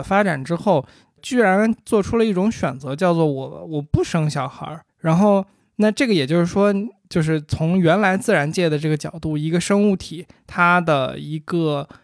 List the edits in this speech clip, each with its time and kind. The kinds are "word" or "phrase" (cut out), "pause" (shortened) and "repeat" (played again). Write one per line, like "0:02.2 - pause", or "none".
0:01.2 - word
0:04.9 - pause

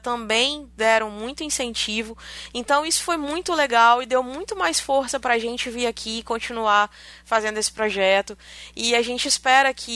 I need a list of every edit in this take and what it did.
none

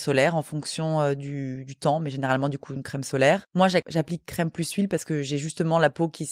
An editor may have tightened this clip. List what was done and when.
0:03.5 - pause

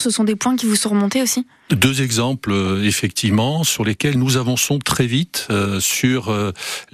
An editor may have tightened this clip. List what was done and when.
none

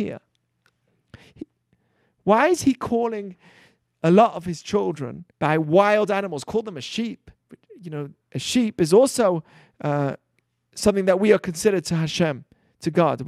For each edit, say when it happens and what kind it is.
0:05.3 - pause
0:07.4 - pause
0:08.2 - pause

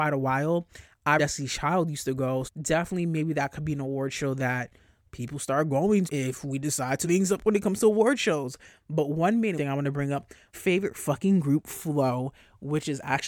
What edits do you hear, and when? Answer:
0:01.2 - word
0:02.5 - word
0:06.1 - word
0:07.0 - word
0:09.6 - word
0:10.5 - word

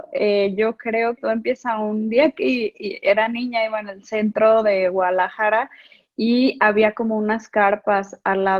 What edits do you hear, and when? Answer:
0:01.2 - word

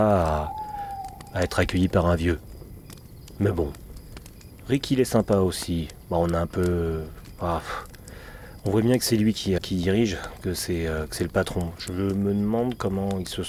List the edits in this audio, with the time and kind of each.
0:09.6 - word

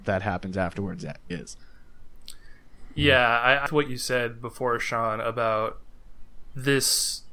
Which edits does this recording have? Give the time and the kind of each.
0:01.3 - word
0:03.7 - phrase

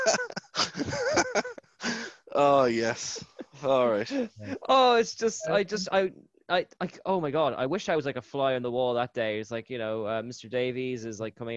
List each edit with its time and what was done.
none

